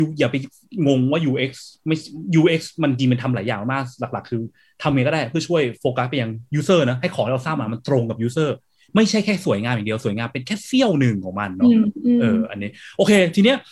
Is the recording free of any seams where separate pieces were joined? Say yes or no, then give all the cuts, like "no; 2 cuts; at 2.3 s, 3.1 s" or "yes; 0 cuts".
yes; 0 cuts